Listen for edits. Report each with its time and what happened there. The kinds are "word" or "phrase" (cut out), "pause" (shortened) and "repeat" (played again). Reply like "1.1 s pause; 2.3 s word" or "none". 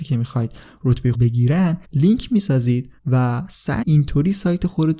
1.1 s word; 1.8 s pause; 3.0 s pause; 3.8 s word